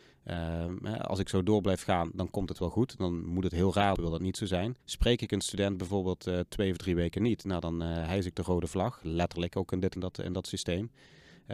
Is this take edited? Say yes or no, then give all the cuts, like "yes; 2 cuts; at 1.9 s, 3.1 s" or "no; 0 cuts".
yes; 3 cuts; at 3.9 s, 4.8 s, 10.0 s